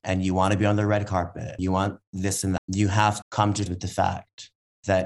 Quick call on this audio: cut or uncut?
cut